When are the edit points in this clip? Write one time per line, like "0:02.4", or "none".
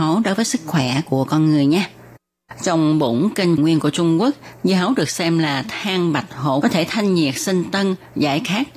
0:03.6
0:06.6